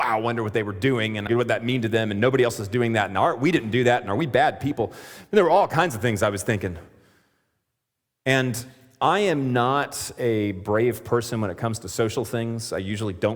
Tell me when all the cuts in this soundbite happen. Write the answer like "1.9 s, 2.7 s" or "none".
1.3 s